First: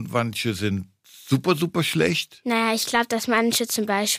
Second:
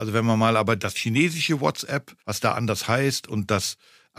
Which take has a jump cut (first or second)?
second